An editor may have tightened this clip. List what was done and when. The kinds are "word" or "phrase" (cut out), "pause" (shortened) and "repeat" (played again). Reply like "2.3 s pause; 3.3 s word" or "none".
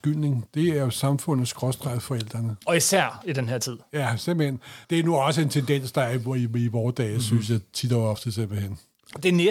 4.8 s pause